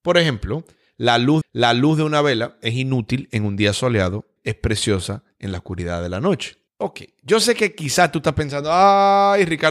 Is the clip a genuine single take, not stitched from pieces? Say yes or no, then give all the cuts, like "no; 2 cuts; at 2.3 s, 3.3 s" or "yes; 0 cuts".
no; 3 cuts; at 1.4 s, 4.4 s, 6.7 s